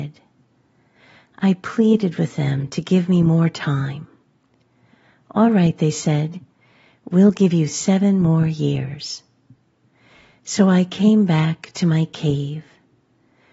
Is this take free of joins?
yes; 0 cuts

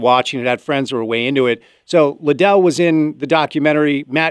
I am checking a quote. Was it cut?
no; 0 cuts

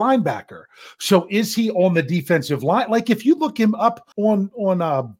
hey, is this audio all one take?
no; 1 cut; at 4.1 s

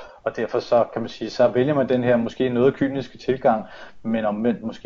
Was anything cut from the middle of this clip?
no; 0 cuts

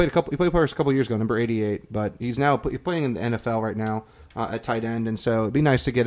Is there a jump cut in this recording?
no; 0 cuts

